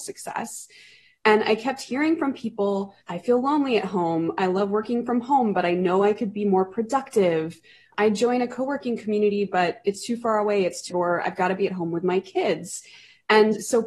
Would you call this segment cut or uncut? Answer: cut